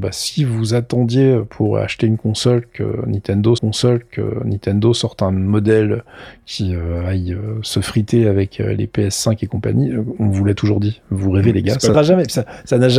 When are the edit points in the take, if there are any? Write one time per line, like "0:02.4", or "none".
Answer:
0:03.6
0:11.9